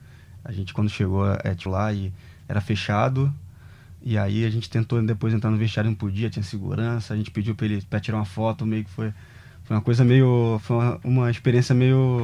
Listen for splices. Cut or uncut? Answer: cut